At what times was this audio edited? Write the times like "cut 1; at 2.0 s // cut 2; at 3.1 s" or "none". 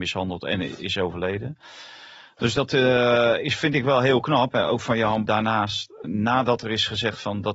cut 1; at 5.3 s // cut 2; at 6.0 s